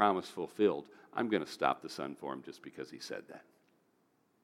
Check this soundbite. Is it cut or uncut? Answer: uncut